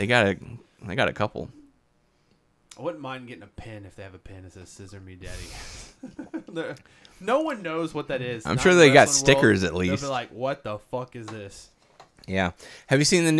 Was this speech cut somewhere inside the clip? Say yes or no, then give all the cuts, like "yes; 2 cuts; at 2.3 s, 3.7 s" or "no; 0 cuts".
no; 0 cuts